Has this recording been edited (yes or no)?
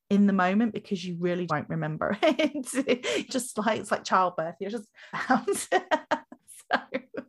yes